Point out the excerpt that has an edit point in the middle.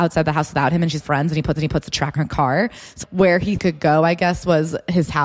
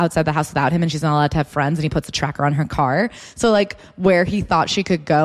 first; 5 cuts; at 1.0 s, 1.6 s, 2.2 s, 3.0 s, 3.6 s

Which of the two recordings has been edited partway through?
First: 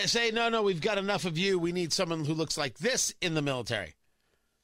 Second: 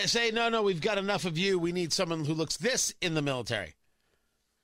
second; 1 cut; at 2.6 s

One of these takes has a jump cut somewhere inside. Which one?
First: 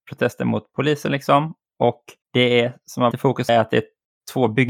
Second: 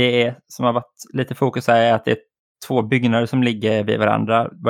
first; 3 cuts; at 2.2 s, 3.1 s, 3.5 s

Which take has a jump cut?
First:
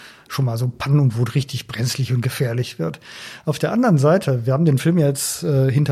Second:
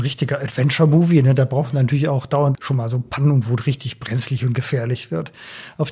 second; 1 cut; at 2.5 s

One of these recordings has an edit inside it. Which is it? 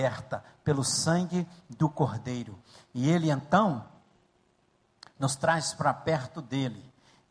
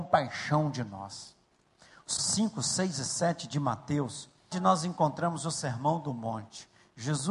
second; 2 cuts; at 2.2 s, 4.5 s

